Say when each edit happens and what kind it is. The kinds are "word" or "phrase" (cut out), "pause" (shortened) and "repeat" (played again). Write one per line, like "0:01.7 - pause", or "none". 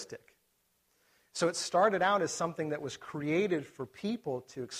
none

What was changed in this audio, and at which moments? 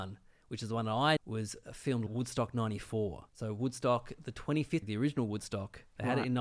0:01.2 - word
0:02.1 - phrase
0:03.3 - pause
0:04.8 - word

